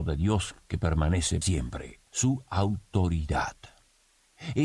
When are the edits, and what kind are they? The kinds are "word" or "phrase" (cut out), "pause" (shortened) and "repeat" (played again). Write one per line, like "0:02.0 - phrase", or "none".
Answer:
0:01.4 - word
0:02.1 - pause